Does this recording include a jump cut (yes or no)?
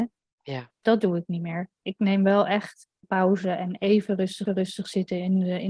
yes